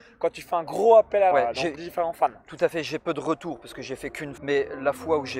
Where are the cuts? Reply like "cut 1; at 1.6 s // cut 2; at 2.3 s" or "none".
cut 1; at 1.3 s // cut 2; at 1.8 s // cut 3; at 4.4 s

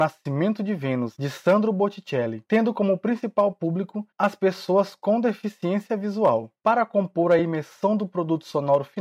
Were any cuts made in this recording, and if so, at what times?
none

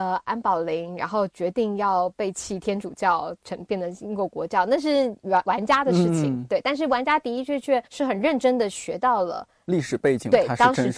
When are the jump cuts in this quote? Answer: cut 1; at 7.9 s

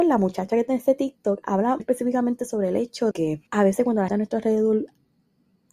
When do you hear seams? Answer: cut 1; at 1.8 s // cut 2; at 3.1 s // cut 3; at 3.5 s // cut 4; at 4.1 s

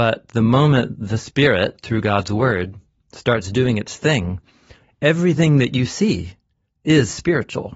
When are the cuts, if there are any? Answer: none

